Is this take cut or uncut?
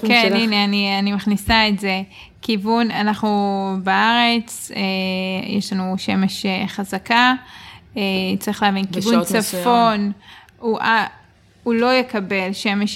uncut